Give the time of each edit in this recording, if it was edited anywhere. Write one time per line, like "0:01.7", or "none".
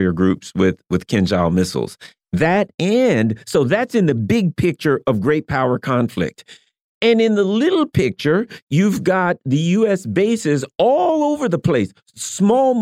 none